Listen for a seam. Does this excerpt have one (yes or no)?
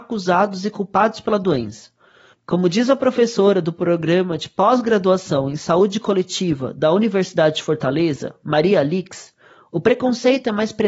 no